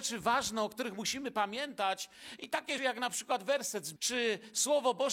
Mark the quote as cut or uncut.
cut